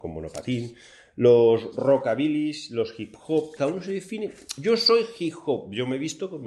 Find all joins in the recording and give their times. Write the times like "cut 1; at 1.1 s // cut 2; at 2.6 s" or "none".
cut 1; at 3.6 s